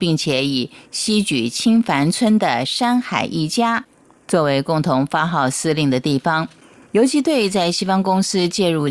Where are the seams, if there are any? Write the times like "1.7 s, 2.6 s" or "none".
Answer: none